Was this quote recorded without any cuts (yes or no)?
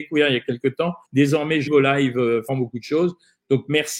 no